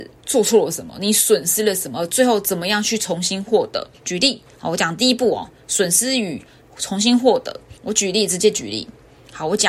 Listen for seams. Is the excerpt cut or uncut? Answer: cut